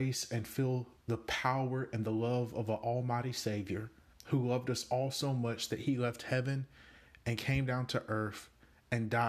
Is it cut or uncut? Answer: cut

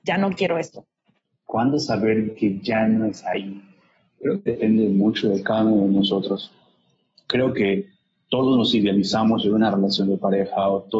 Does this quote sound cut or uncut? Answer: uncut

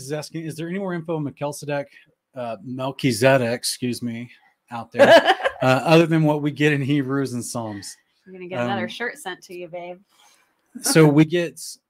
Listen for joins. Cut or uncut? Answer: uncut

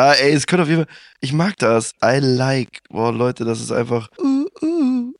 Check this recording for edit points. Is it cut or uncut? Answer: cut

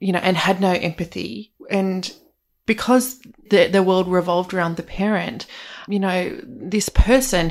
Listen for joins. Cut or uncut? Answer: uncut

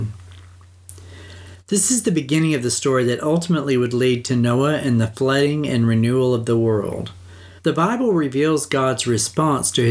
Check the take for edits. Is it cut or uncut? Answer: cut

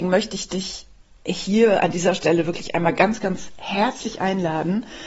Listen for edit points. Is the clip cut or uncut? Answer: cut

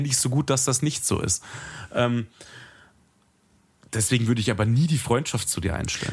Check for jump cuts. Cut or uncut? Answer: uncut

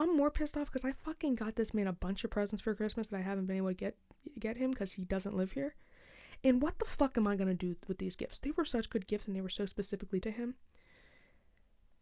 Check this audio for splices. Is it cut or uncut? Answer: cut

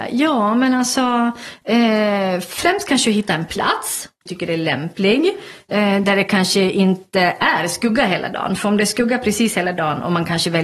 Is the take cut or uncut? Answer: cut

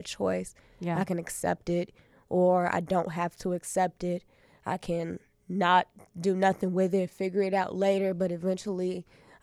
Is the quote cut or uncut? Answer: uncut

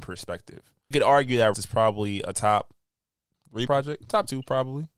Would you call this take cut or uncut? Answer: cut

